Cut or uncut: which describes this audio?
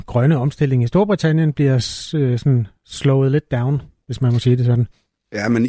uncut